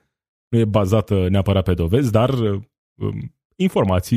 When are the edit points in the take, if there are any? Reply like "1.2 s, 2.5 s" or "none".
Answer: none